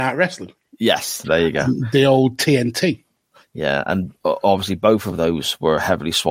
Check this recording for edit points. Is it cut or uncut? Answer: uncut